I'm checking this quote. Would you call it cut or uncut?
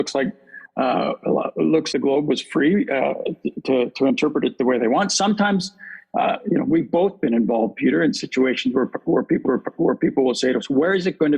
cut